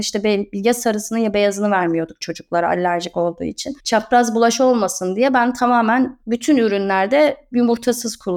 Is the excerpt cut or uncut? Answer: cut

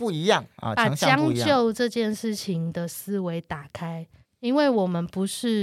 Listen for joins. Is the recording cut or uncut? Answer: cut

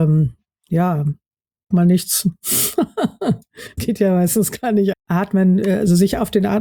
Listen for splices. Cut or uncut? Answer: cut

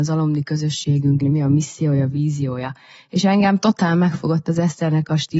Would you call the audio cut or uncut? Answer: cut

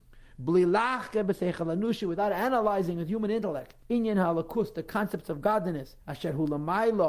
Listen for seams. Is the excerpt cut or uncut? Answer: cut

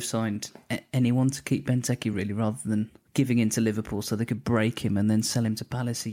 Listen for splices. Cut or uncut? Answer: uncut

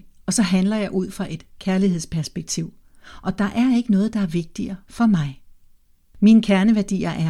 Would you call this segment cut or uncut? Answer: uncut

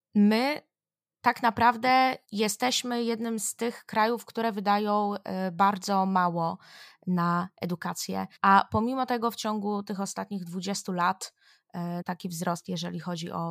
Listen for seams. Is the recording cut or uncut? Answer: cut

